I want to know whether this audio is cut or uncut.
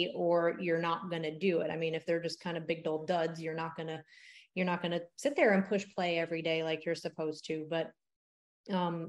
uncut